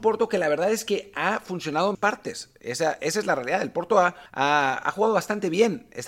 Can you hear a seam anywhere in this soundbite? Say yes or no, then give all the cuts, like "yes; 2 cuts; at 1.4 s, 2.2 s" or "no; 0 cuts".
yes; 2 cuts; at 1.9 s, 4.3 s